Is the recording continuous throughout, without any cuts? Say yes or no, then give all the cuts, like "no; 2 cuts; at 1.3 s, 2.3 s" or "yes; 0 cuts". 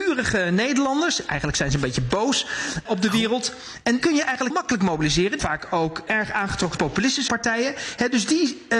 no; 7 cuts; at 2.9 s, 4.0 s, 4.5 s, 5.4 s, 6.1 s, 6.8 s, 7.3 s